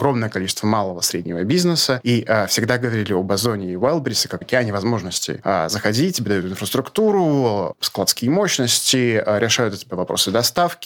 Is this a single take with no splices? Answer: no; 1 cut; at 4.4 s

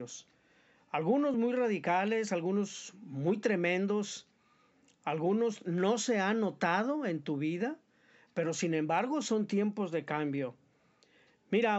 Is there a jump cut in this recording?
no; 0 cuts

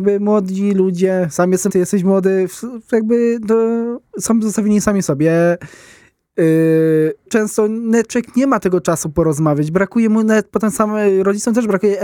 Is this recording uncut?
no; 2 cuts; at 1.7 s, 7.3 s

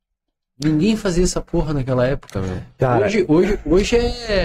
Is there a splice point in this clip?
no; 0 cuts

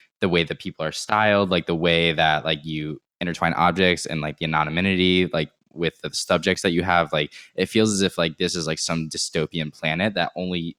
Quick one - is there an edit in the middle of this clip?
no; 0 cuts

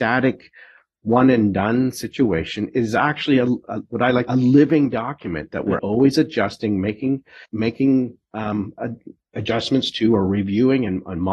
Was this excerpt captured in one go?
no; 3 cuts; at 4.3 s, 5.8 s, 7.5 s

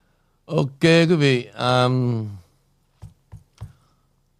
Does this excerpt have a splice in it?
no; 0 cuts

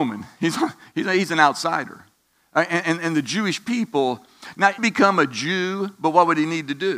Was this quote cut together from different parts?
yes; 1 cut; at 4.8 s

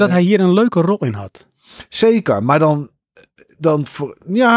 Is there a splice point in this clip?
no; 0 cuts

